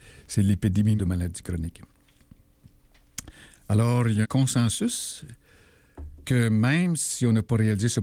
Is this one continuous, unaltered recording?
no; 3 cuts; at 1.0 s, 4.2 s, 6.2 s

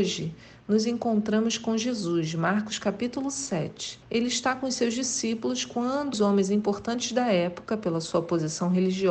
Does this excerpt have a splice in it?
yes; 2 cuts; at 4.0 s, 6.1 s

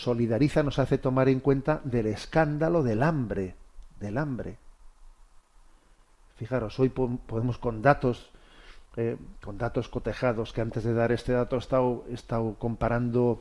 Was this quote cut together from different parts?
no; 0 cuts

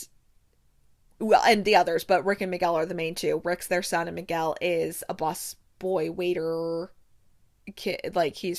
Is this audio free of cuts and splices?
yes; 0 cuts

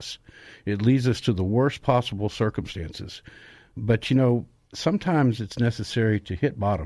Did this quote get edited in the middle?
no; 0 cuts

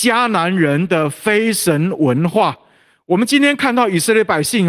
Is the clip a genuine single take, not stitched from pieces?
yes; 0 cuts

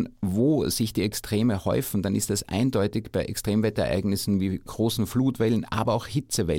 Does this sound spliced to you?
no; 0 cuts

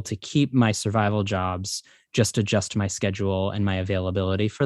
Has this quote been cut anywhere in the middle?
no; 0 cuts

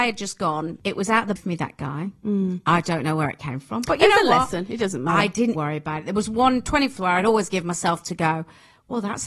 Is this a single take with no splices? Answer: no; 3 cuts; at 1.4 s, 5.5 s, 7.0 s

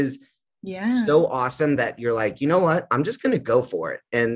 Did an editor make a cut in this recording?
no; 0 cuts

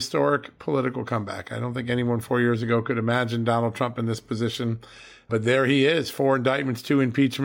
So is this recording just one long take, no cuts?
yes; 0 cuts

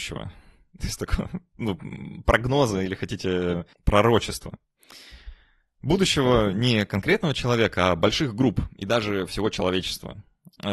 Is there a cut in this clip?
no; 0 cuts

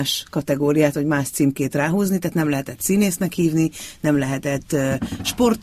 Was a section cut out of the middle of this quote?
no; 0 cuts

